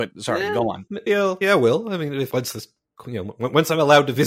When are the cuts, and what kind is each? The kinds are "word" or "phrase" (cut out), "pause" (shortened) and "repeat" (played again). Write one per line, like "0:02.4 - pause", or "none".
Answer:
0:01.1 - word
0:01.4 - word
0:02.3 - word
0:03.0 - word